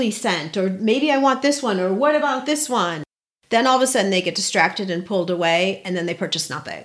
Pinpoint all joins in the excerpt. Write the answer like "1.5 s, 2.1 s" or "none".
none